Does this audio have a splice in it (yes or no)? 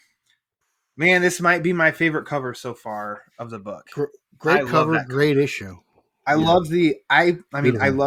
no